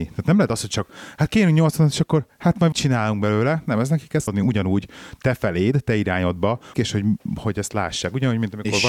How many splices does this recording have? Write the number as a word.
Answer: three